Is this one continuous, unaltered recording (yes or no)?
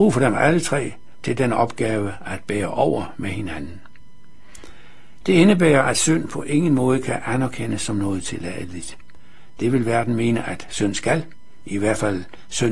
yes